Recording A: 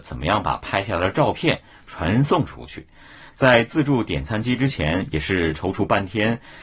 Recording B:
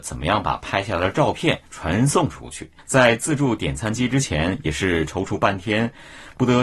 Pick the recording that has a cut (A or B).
B